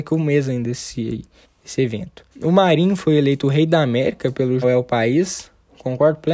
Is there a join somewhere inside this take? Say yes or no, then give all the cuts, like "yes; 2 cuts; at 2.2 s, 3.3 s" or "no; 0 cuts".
yes; 3 cuts; at 1.4 s, 2.3 s, 4.6 s